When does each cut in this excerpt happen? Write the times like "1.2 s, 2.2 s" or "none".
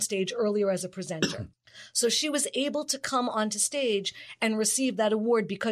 1.5 s